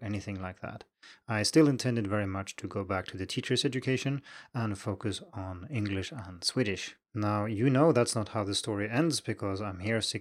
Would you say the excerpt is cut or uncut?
cut